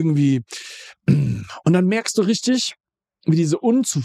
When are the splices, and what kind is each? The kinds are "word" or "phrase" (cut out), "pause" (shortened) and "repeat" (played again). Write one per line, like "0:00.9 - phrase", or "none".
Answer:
none